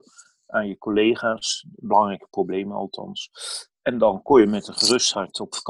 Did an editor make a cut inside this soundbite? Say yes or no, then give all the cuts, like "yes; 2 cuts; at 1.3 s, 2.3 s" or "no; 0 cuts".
no; 0 cuts